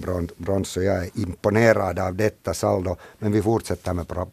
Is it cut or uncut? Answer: uncut